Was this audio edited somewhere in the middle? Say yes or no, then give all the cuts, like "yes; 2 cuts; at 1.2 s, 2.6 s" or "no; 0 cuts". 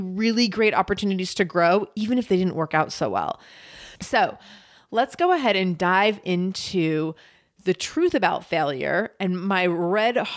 no; 0 cuts